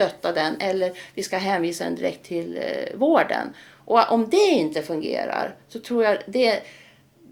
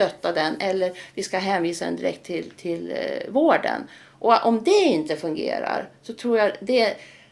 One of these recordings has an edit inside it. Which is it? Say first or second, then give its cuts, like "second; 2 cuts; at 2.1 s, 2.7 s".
first; 1 cut; at 2.2 s